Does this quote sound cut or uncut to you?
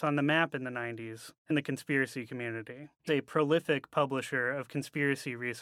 cut